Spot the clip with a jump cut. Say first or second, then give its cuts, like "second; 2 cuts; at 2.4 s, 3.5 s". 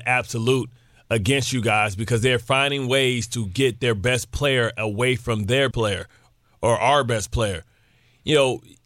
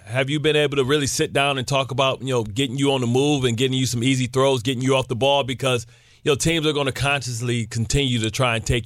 first; 1 cut; at 5.7 s